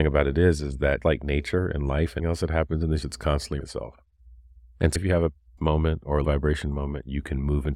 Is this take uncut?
no; 7 cuts; at 1.0 s, 2.2 s, 3.0 s, 3.6 s, 5.0 s, 5.6 s, 6.2 s

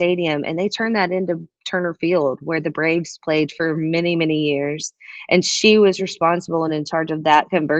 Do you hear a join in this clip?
no; 0 cuts

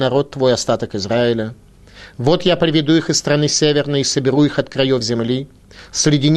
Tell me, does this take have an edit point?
no; 0 cuts

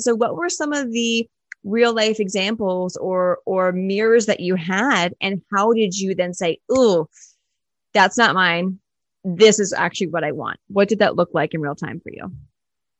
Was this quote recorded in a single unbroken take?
yes; 0 cuts

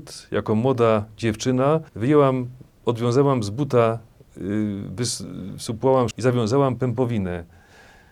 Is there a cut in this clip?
yes; 2 cuts; at 1.9 s, 6.1 s

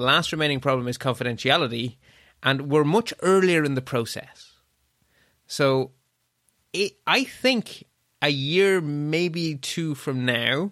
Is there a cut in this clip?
no; 0 cuts

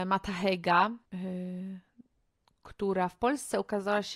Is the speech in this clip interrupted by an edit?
yes; 1 cut; at 1.1 s

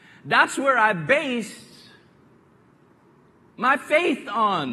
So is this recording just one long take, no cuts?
yes; 0 cuts

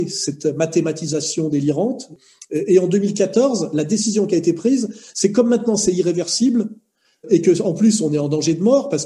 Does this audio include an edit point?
no; 0 cuts

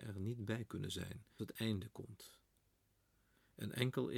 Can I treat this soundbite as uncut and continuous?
no; 1 cut; at 1.4 s

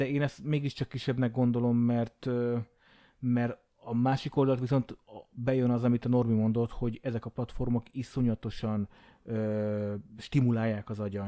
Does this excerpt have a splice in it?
no; 0 cuts

